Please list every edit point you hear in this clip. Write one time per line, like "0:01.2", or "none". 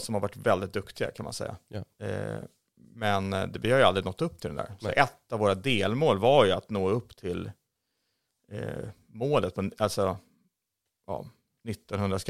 none